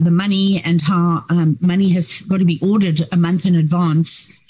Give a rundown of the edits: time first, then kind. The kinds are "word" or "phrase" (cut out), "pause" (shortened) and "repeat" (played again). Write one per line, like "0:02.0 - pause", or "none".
none